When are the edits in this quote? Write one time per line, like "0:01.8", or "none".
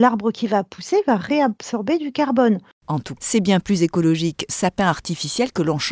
0:03.2
0:04.5